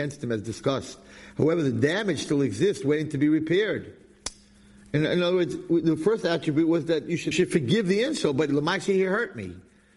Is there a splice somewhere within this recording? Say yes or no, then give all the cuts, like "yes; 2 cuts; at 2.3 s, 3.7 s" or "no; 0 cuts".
yes; 1 cut; at 7.3 s